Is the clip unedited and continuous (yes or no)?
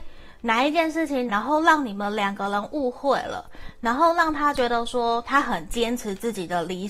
no